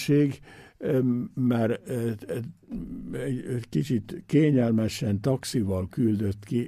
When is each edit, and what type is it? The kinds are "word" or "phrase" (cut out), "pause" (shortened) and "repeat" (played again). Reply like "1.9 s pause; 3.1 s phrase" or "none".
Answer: none